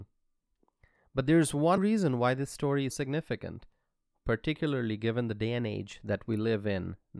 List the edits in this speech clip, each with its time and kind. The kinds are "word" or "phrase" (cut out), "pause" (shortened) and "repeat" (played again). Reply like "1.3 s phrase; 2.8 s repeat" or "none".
1.8 s word; 2.9 s word